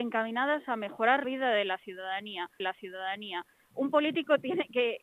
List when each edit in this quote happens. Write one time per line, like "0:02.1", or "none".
0:01.2
0:02.6

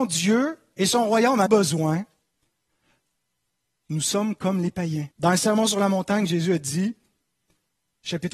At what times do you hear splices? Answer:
0:01.5
0:05.1

